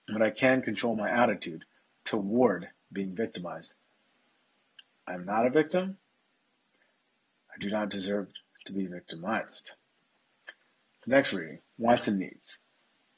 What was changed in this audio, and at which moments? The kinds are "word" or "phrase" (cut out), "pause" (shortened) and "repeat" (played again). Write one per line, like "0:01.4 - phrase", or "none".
none